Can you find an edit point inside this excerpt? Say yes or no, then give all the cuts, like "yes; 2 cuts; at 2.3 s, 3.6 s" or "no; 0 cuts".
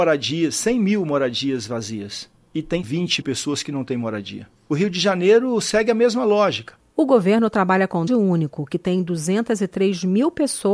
yes; 2 cuts; at 3.2 s, 8.1 s